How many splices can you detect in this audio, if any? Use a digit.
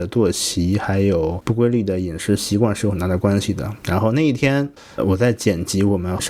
1